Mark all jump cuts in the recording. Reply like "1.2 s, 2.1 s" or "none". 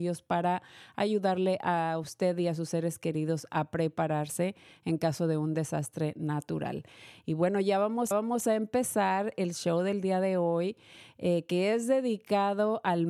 8.1 s